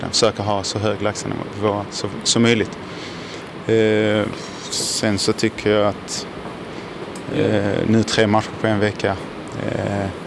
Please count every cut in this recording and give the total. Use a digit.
0